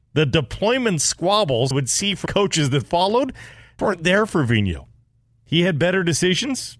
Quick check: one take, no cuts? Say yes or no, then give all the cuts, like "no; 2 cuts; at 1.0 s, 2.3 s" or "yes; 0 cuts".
no; 3 cuts; at 1.7 s, 2.3 s, 3.8 s